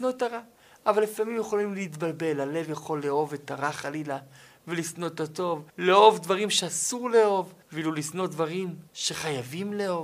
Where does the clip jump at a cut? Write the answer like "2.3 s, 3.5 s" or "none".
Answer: 5.7 s, 7.6 s, 8.9 s